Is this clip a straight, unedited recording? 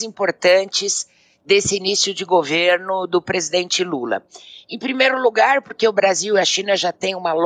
yes; 0 cuts

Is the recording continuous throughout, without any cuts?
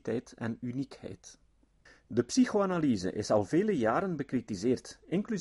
no; 1 cut; at 1.9 s

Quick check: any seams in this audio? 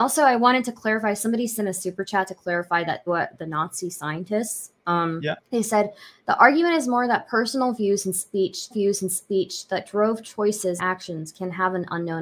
yes; 4 cuts; at 3.1 s, 5.4 s, 8.7 s, 10.8 s

